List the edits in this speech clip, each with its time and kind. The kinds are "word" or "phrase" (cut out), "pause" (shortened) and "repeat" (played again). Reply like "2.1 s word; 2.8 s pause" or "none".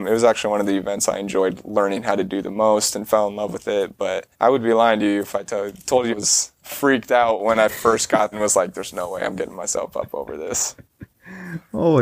4.3 s pause; 6.1 s word; 8.3 s word

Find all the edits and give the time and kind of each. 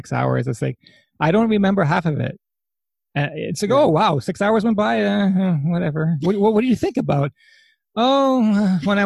none

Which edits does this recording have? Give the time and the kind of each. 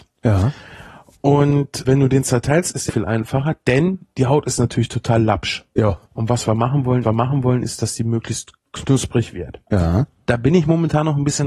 1.8 s word; 2.9 s phrase; 6.1 s pause; 7.0 s repeat

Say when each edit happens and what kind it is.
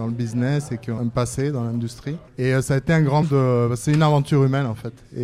1.0 s word; 2.3 s pause; 3.2 s word

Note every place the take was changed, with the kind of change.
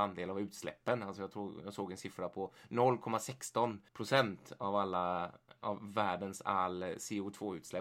3.9 s pause

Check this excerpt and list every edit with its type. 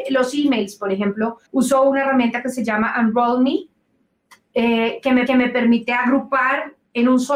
1.5 s pause; 5.3 s repeat

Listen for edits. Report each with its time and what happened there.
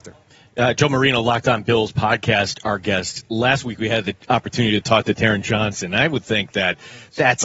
none

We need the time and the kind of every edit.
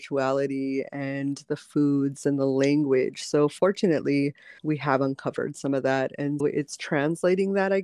4.6 s pause; 6.4 s word

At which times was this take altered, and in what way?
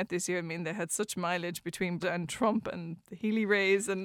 2.0 s word

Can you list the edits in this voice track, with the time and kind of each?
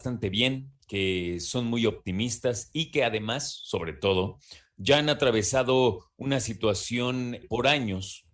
none

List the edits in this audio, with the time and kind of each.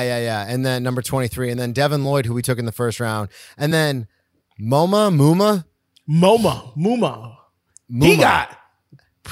none

